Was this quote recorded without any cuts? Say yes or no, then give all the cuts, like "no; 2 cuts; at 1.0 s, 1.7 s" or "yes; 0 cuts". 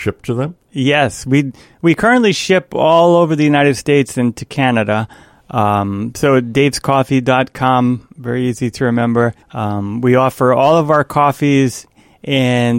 no; 1 cut; at 9.4 s